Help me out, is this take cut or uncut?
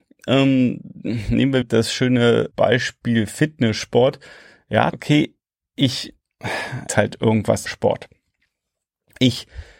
cut